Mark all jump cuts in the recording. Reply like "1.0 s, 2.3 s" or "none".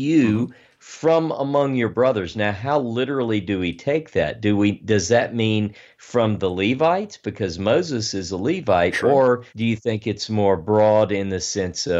9.5 s